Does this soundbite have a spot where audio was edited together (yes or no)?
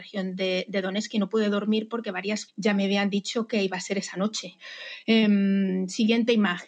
yes